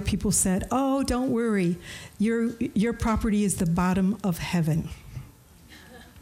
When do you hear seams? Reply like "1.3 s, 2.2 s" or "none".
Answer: none